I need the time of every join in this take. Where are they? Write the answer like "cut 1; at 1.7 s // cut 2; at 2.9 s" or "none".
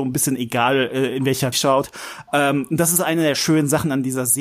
cut 1; at 1.5 s